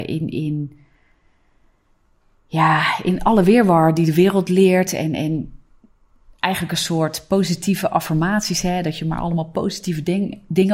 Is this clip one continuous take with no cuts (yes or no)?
yes